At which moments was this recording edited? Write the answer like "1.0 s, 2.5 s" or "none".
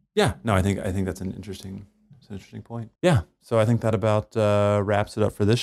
3.0 s